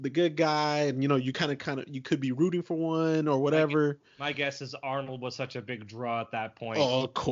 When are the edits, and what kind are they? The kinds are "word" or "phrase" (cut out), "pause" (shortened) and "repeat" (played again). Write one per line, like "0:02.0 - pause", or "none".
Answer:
none